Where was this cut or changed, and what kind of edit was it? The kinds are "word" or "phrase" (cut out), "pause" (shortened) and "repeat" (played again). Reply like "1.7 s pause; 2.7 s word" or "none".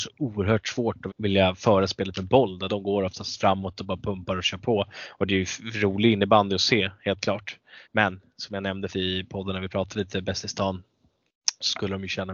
1.1 s word; 2.7 s word; 7.8 s pause; 8.9 s word